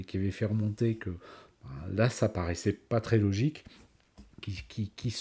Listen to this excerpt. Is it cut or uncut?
cut